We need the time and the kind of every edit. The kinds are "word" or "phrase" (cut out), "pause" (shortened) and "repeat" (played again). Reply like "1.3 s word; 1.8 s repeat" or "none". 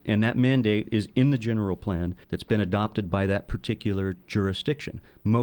2.2 s pause